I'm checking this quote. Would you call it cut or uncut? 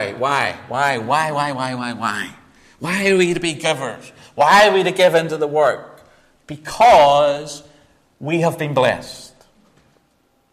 uncut